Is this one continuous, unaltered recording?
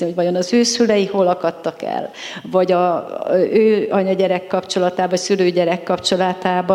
yes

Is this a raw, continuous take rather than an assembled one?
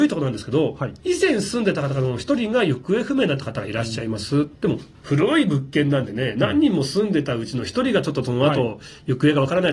no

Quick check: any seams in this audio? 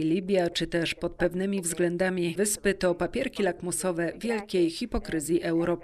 yes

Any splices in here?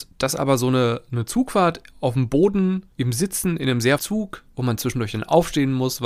yes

